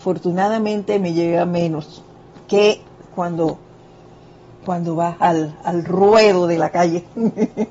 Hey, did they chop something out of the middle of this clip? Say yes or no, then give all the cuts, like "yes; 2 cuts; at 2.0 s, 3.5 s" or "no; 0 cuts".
no; 0 cuts